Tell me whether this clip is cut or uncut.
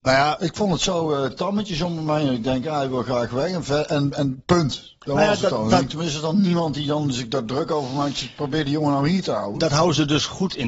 uncut